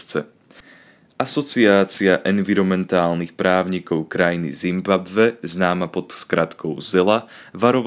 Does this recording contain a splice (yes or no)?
no